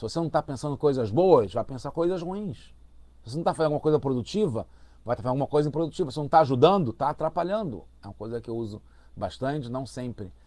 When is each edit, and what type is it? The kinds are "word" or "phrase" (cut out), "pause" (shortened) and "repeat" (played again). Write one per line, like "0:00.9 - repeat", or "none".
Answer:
none